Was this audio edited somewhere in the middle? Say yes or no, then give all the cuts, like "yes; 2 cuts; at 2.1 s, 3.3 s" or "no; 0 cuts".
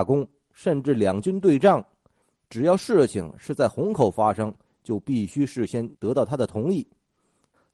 yes; 1 cut; at 5.9 s